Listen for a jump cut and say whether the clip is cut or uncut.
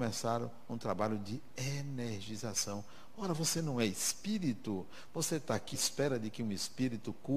cut